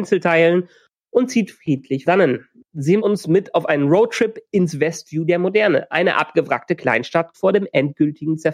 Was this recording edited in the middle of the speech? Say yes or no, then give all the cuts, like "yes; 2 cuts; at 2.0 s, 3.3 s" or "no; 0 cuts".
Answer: yes; 3 cuts; at 2.1 s, 3.0 s, 7.3 s